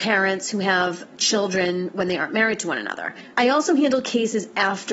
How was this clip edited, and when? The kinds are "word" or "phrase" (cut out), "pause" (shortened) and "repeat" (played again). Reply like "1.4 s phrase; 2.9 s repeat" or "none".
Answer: 3.3 s pause